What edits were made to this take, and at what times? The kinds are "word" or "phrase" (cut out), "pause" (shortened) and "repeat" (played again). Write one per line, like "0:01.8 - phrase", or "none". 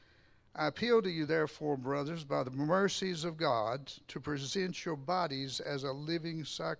none

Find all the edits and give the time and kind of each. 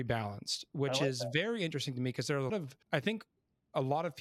0:02.5 - word
0:02.8 - pause

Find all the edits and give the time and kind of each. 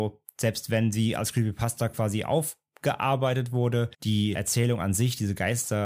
0:03.9 - pause

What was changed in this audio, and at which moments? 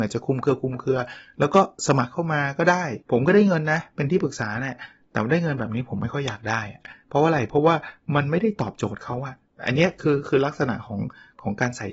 0:03.0 - pause
0:09.5 - pause

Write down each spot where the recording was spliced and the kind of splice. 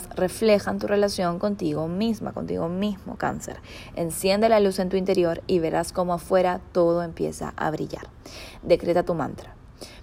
none

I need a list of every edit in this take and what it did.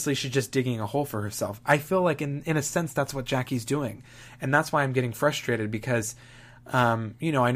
none

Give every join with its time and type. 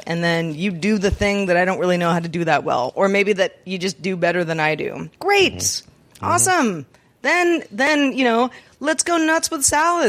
0:05.2 - pause

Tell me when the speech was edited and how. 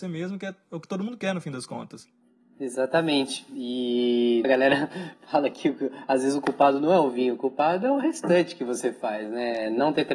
0:04.4 - word

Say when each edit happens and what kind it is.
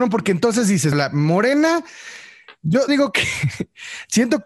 0:00.9 - word
0:02.9 - word

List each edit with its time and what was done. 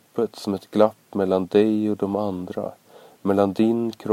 none

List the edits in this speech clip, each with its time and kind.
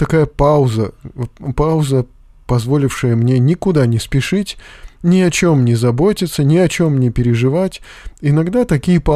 none

